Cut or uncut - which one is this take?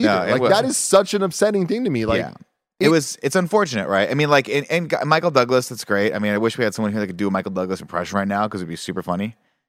uncut